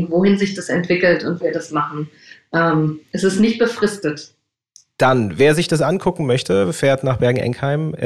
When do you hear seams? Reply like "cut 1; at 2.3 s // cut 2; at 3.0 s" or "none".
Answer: cut 1; at 1.4 s